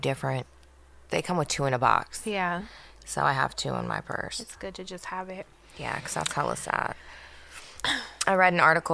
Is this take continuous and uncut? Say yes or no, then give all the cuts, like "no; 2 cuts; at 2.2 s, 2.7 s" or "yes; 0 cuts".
yes; 0 cuts